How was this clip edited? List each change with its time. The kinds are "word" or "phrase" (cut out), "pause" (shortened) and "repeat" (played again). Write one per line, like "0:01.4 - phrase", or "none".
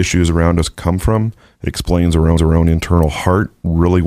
0:01.5 - pause
0:02.4 - repeat